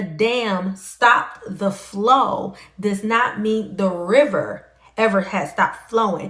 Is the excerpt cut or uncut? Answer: uncut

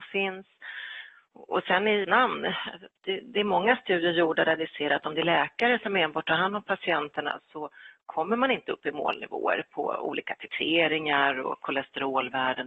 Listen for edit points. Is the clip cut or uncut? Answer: cut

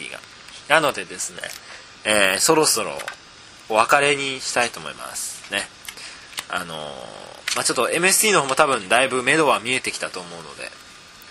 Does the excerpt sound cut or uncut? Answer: uncut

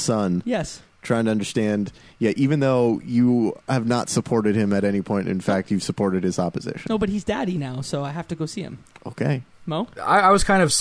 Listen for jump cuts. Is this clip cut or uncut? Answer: uncut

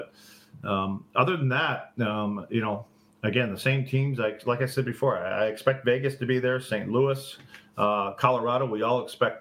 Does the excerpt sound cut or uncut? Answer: uncut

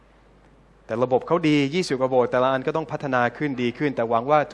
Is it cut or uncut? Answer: uncut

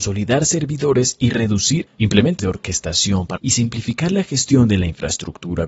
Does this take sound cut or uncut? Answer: cut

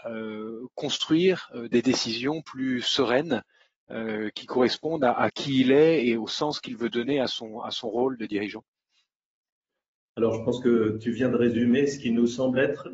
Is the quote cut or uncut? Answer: uncut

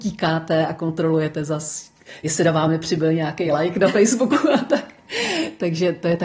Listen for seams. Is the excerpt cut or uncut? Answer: uncut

